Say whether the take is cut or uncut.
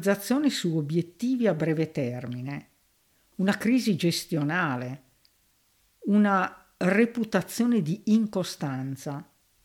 uncut